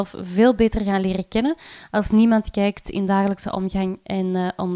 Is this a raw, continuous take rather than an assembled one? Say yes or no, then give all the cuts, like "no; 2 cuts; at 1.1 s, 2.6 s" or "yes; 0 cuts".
yes; 0 cuts